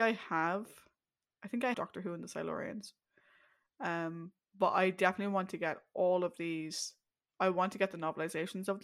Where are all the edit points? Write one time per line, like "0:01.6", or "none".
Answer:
0:01.7